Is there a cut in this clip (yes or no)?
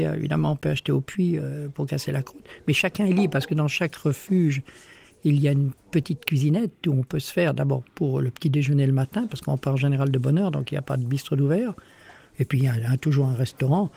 no